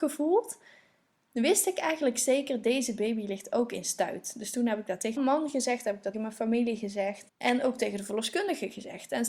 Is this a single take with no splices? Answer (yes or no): no